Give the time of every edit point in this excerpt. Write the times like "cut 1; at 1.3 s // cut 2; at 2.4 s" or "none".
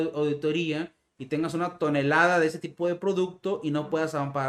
none